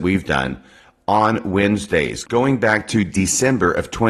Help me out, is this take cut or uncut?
uncut